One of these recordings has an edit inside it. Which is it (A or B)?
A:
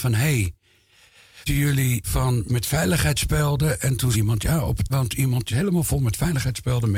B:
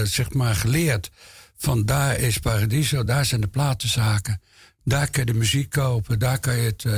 A